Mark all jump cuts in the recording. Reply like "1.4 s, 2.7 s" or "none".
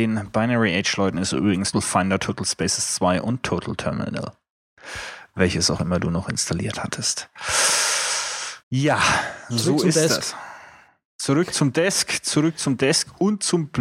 1.7 s, 8.6 s